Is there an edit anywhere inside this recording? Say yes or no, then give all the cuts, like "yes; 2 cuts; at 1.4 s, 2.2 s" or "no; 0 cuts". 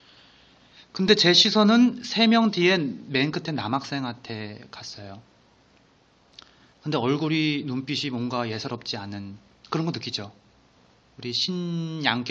no; 0 cuts